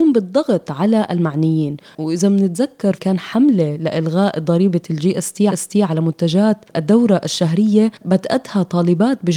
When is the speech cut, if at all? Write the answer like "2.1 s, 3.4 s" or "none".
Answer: 3.0 s, 5.5 s